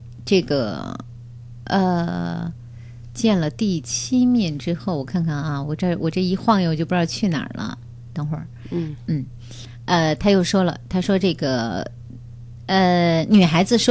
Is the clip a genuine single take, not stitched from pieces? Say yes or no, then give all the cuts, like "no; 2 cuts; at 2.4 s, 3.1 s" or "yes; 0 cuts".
yes; 0 cuts